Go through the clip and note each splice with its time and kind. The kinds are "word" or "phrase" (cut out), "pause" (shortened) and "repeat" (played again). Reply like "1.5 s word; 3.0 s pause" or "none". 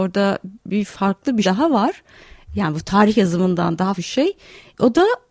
1.4 s word; 4.0 s word